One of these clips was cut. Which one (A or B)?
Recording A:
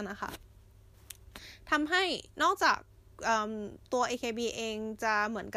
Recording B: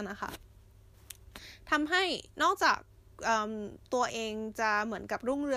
B